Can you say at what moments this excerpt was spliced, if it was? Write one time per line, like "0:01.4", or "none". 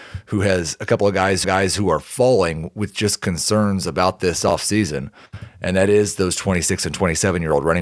0:01.4